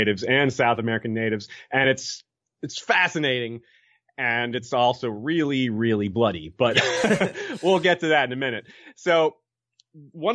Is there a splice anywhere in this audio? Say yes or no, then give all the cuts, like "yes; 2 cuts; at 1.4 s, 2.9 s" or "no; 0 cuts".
no; 0 cuts